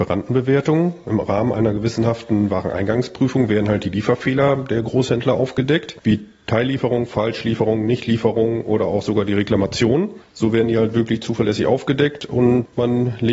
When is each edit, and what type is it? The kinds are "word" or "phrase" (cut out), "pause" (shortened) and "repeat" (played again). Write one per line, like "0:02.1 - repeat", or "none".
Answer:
none